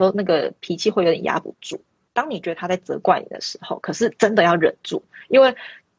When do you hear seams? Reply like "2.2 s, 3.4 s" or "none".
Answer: none